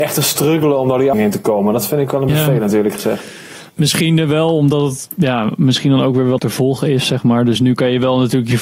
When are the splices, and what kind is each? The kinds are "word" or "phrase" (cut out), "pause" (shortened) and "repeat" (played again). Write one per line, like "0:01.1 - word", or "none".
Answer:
0:01.1 - word
0:02.3 - word
0:03.7 - pause
0:06.4 - word